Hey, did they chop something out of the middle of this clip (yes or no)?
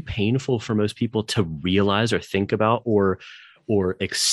no